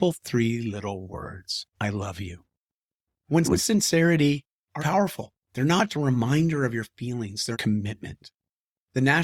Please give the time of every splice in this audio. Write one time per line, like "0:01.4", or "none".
0:01.7
0:03.4
0:04.8
0:05.4
0:05.9
0:07.5